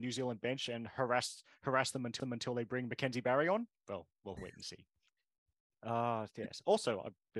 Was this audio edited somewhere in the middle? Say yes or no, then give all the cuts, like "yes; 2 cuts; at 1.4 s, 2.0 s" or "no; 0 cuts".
yes; 2 cuts; at 2.2 s, 4.4 s